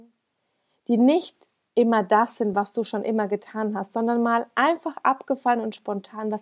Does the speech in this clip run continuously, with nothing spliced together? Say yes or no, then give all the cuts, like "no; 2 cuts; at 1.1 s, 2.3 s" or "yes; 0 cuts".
yes; 0 cuts